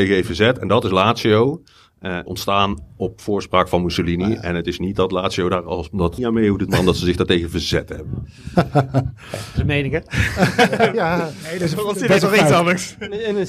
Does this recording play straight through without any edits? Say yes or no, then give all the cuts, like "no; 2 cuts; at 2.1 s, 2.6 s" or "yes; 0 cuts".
no; 3 cuts; at 2.3 s, 6.2 s, 6.7 s